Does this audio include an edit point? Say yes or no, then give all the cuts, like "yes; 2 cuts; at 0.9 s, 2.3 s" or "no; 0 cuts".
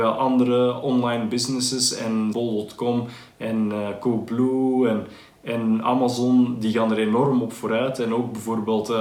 yes; 1 cut; at 2.3 s